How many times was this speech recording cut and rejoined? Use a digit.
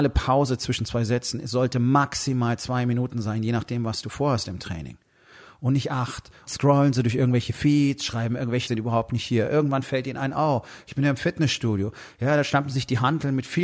2